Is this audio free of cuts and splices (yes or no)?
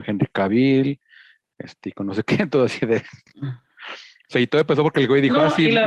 yes